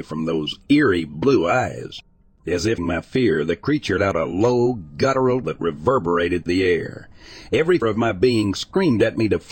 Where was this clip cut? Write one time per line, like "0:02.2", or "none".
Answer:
0:02.8
0:04.0
0:05.4
0:06.5
0:07.8